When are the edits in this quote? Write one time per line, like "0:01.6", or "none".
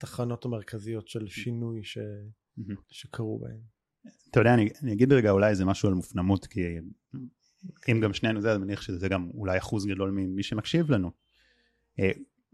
0:02.8